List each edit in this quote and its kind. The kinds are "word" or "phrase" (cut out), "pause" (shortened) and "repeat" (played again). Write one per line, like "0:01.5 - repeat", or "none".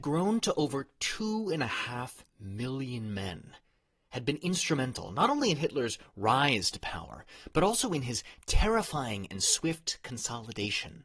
none